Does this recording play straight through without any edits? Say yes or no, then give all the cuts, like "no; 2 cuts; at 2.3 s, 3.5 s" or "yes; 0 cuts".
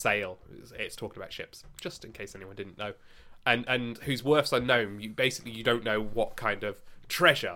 yes; 0 cuts